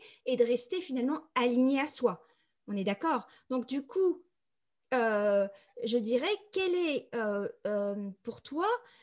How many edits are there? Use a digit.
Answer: 0